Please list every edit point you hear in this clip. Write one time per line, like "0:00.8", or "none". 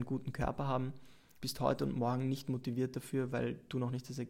0:01.4